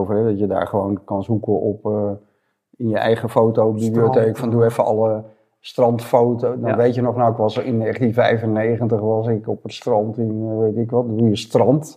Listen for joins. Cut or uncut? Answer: uncut